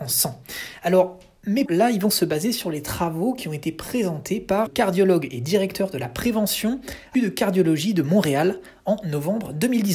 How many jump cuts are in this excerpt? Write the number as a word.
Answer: three